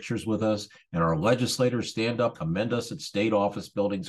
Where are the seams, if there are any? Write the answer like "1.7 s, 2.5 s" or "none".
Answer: 2.3 s